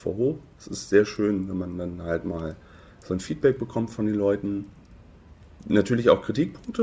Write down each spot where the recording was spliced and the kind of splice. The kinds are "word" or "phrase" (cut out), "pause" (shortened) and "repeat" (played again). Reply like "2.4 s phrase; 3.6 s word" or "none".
none